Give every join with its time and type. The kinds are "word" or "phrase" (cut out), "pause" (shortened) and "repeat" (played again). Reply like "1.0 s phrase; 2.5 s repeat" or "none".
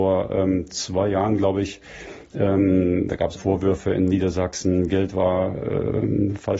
3.4 s word